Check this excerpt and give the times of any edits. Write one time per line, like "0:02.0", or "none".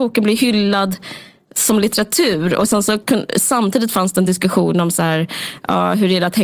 none